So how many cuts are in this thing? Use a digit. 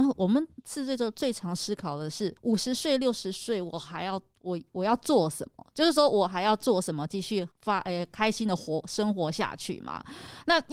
2